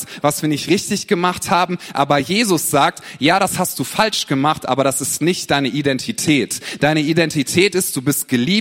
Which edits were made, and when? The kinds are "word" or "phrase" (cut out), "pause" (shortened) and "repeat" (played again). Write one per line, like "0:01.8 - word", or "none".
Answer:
none